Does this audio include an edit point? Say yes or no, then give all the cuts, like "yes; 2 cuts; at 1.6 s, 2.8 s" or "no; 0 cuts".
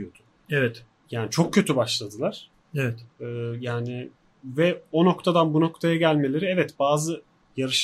no; 0 cuts